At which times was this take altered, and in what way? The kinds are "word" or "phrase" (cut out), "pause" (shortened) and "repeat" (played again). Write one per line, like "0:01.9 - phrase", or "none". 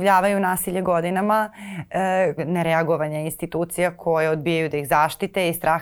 0:02.4 - phrase